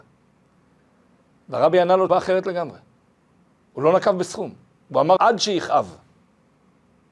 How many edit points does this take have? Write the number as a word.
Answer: two